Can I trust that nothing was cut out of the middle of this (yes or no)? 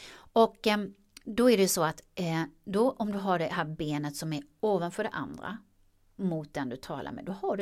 yes